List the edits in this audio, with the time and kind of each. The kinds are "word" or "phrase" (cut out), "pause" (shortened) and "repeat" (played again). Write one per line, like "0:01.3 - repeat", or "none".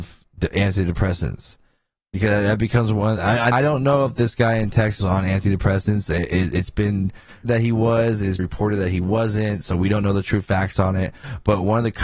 0:03.5 - word
0:05.0 - word
0:07.4 - word
0:08.4 - word